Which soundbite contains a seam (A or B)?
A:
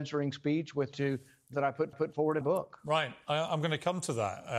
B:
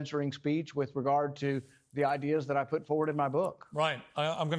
A